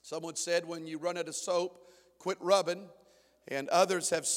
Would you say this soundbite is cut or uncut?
uncut